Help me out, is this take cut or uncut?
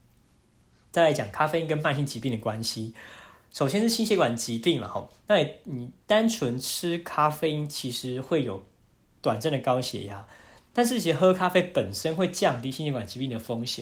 cut